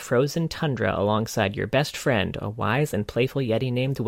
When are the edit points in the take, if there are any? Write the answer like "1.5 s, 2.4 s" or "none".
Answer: none